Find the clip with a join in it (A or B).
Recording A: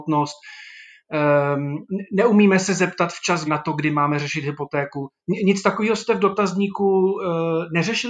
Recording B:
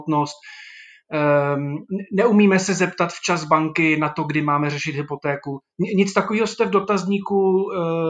A